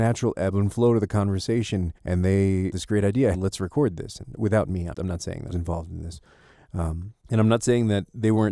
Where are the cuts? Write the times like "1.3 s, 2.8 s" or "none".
2.0 s, 2.7 s, 3.3 s, 4.9 s, 5.5 s, 7.2 s